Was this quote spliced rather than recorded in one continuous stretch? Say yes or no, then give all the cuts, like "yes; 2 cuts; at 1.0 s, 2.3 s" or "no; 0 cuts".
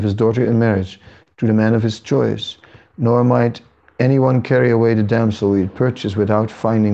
no; 0 cuts